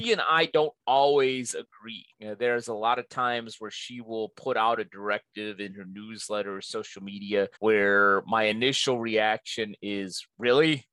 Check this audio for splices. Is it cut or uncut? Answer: cut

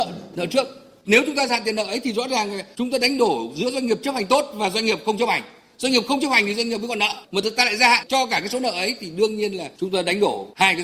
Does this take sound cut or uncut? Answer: uncut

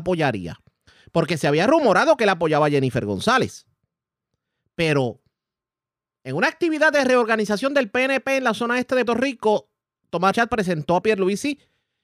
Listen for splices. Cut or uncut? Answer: cut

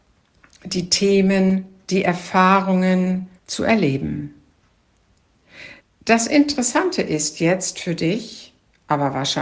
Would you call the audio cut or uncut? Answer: cut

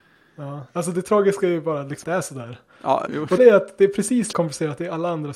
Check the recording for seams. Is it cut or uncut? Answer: cut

